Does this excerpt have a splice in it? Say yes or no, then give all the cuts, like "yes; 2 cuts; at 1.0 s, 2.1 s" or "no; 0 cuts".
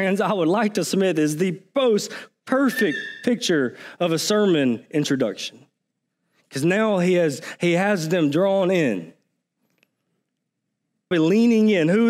yes; 1 cut; at 11.1 s